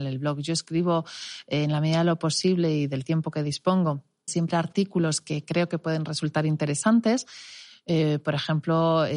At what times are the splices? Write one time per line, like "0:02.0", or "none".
0:04.3

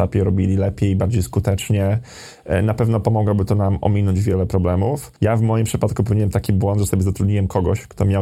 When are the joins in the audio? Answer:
0:05.2

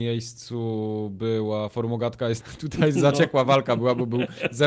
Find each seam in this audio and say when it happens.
0:02.4

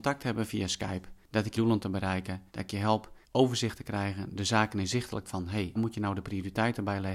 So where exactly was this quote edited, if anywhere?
0:01.2
0:01.5
0:02.5
0:03.2
0:05.3
0:05.8

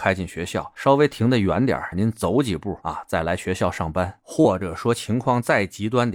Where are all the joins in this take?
0:01.9

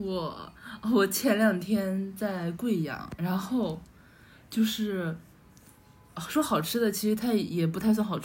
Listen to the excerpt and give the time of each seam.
none

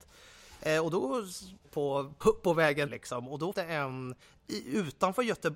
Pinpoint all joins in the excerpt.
0:01.6
0:02.2
0:02.9
0:03.5
0:04.2

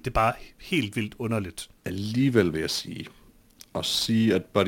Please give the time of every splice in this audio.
0:01.8

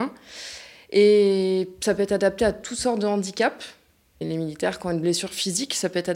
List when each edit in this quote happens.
none

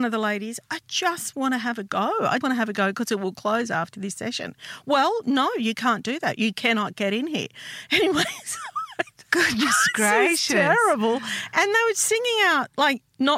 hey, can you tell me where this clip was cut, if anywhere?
0:02.4

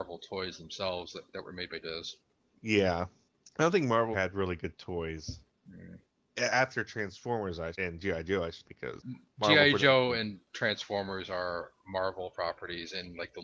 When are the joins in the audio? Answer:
0:01.3
0:01.8
0:04.1
0:07.7
0:08.6
0:09.0

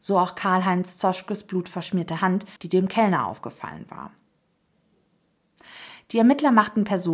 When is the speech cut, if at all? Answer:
0:02.6

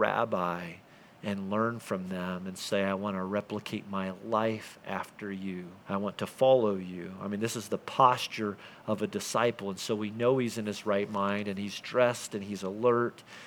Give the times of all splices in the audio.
0:05.8

